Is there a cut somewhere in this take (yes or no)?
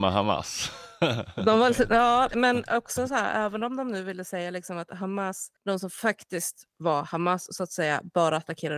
yes